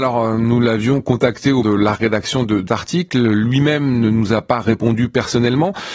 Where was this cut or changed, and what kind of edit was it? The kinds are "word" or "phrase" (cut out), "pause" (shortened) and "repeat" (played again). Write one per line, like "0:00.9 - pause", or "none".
0:01.6 - word
0:02.7 - word